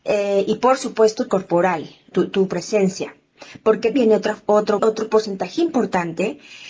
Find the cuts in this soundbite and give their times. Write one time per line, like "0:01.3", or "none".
0:01.3
0:02.1
0:03.9
0:04.8
0:05.6